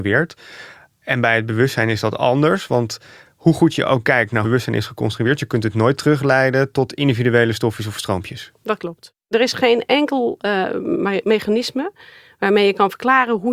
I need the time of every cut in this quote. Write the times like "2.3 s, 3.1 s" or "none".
4.4 s